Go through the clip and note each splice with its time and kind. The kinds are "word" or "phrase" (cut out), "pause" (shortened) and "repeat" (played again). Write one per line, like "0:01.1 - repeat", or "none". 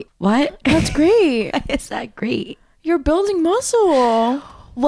none